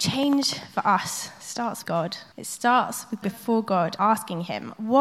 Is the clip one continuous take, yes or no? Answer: no